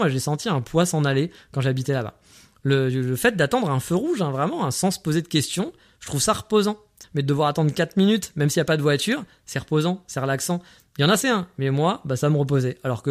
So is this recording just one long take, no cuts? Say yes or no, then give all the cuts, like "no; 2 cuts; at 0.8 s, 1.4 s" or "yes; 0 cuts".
no; 2 cuts; at 7.0 s, 11.2 s